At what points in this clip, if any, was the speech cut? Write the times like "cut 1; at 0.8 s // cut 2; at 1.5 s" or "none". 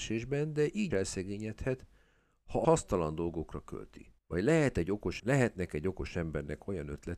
cut 1; at 0.9 s // cut 2; at 2.6 s // cut 3; at 4.2 s // cut 4; at 5.2 s

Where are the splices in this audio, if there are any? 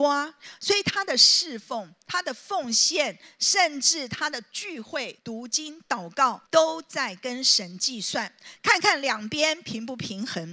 cut 1; at 5.2 s // cut 2; at 6.5 s

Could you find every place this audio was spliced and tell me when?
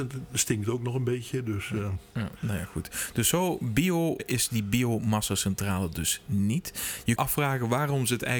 cut 1; at 4.2 s // cut 2; at 7.2 s

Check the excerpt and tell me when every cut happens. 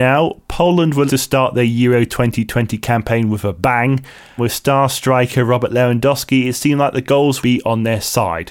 cut 1; at 1.1 s // cut 2; at 4.4 s // cut 3; at 7.4 s

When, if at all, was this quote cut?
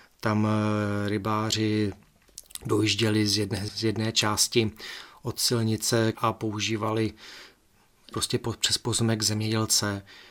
cut 1; at 3.7 s // cut 2; at 6.1 s // cut 3; at 8.1 s

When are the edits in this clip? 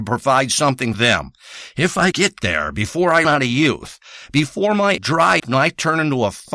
cut 1; at 0.9 s // cut 2; at 2.1 s // cut 3; at 3.2 s // cut 4; at 5.0 s // cut 5; at 5.4 s

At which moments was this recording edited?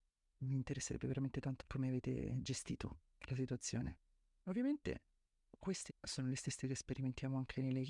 cut 1; at 1.6 s // cut 2; at 5.9 s

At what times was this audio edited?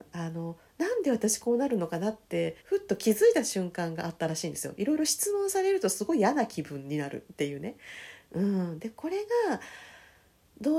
cut 1; at 2.6 s

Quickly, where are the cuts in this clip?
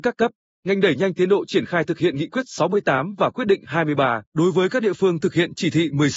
cut 1; at 4.2 s

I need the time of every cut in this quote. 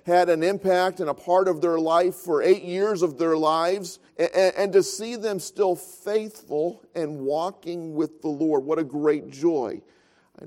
cut 1; at 4.1 s

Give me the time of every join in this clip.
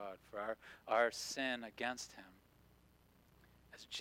none

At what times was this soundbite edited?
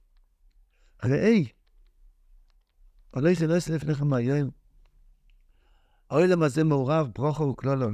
none

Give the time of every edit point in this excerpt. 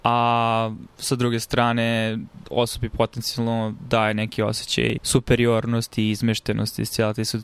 cut 1; at 5.0 s

